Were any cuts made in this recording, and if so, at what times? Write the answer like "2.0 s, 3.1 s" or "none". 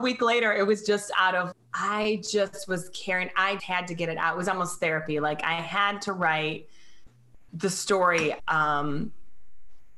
1.5 s, 3.6 s, 8.4 s